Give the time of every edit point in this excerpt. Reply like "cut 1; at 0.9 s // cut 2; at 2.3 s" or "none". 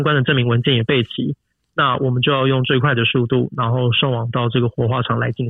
none

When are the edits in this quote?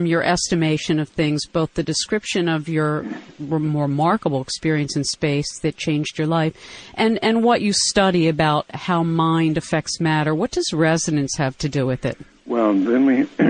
none

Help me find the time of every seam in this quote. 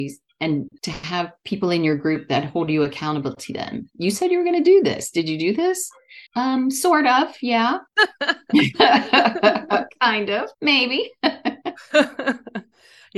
cut 1; at 6.3 s // cut 2; at 7.9 s // cut 3; at 10.5 s

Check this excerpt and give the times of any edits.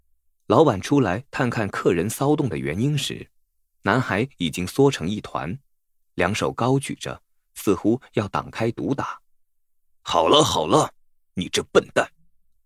none

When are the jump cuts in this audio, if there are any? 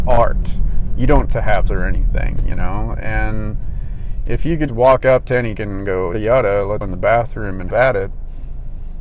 cut 1; at 1.2 s // cut 2; at 1.7 s // cut 3; at 4.7 s // cut 4; at 5.5 s // cut 5; at 6.1 s // cut 6; at 6.8 s // cut 7; at 7.7 s

